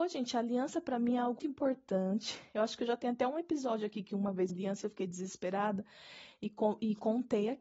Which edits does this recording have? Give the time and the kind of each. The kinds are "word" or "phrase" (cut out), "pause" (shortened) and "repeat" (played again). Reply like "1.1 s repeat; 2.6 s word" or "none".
1.4 s word; 4.5 s phrase